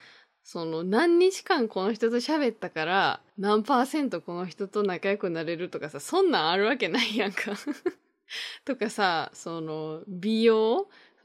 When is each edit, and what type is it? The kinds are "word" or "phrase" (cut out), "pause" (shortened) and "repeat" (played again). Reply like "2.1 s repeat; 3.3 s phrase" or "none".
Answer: 3.3 s pause; 8.0 s pause